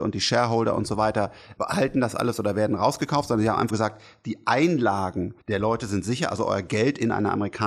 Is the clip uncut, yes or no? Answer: no